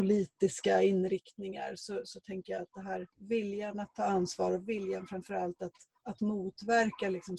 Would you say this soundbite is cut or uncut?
cut